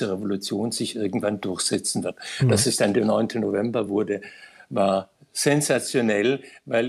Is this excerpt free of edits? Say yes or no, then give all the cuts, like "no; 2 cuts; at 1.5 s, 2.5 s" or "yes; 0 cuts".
yes; 0 cuts